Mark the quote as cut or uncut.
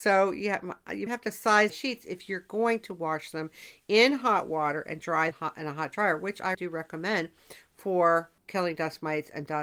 cut